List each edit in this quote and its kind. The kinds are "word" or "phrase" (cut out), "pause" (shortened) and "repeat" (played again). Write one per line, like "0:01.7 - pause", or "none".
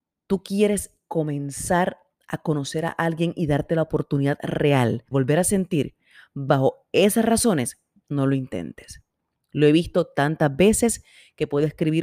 0:05.1 - word